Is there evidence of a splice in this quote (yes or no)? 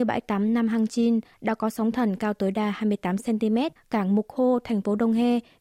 yes